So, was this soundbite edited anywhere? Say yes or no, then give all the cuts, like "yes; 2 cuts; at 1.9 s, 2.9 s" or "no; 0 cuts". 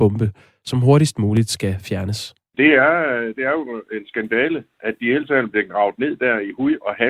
no; 0 cuts